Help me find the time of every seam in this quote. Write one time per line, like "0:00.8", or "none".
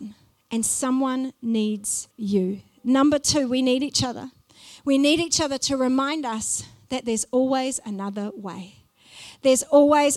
0:02.1